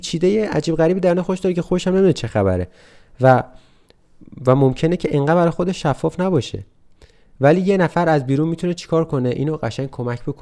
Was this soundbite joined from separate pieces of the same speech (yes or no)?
no